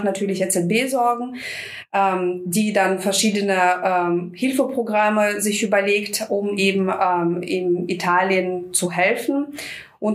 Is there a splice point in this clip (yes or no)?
no